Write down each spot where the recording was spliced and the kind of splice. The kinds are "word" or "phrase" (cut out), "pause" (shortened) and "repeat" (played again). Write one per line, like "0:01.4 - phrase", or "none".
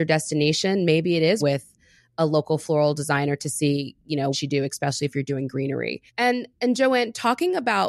0:01.4 - word
0:04.3 - phrase
0:06.1 - pause